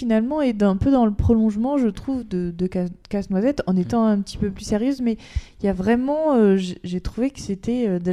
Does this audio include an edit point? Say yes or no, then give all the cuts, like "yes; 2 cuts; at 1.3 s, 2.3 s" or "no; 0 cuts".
no; 0 cuts